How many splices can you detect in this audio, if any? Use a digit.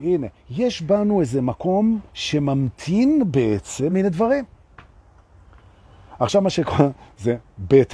2